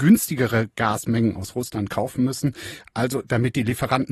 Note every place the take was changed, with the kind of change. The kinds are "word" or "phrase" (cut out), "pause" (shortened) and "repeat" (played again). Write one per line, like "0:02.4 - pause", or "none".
none